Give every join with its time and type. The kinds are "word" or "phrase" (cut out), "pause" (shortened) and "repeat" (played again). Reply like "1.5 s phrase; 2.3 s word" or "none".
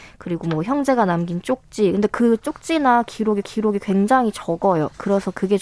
3.4 s repeat